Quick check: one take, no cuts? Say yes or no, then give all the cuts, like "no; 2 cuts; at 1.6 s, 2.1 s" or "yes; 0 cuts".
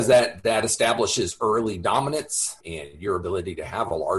no; 1 cut; at 2.6 s